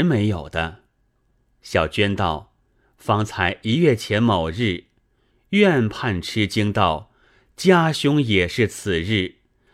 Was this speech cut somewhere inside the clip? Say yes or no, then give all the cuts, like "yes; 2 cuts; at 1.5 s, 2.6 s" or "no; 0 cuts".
no; 0 cuts